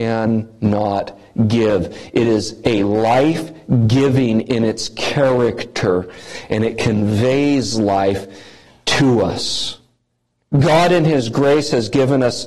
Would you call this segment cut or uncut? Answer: uncut